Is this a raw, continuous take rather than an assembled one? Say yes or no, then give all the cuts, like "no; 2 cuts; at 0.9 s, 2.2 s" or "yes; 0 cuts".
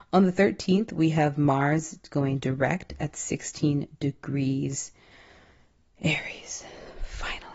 yes; 0 cuts